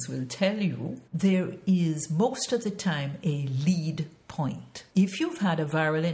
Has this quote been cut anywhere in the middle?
yes; 2 cuts; at 1.1 s, 4.9 s

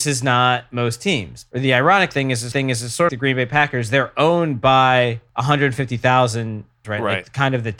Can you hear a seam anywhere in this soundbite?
yes; 3 cuts; at 2.5 s, 3.1 s, 6.8 s

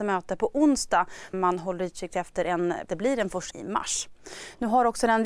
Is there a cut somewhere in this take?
yes; 3 cuts; at 1.3 s, 2.9 s, 3.5 s

